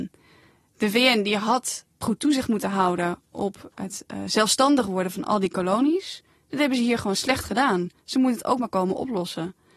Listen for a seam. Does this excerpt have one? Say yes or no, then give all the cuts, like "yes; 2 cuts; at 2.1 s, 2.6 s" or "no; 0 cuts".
no; 0 cuts